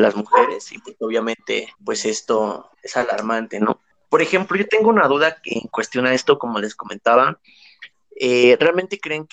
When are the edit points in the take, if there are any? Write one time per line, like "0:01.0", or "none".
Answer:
0:01.7
0:02.7
0:03.9